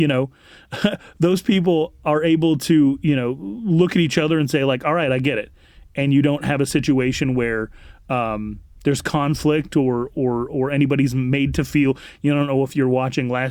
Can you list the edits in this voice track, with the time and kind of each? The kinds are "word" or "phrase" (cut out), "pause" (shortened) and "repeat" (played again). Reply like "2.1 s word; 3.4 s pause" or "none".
none